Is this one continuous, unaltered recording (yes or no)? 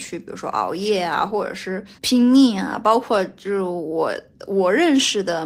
no